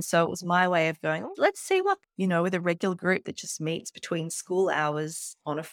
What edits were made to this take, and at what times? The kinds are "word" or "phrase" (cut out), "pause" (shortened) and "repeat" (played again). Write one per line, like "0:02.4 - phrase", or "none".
0:02.0 - phrase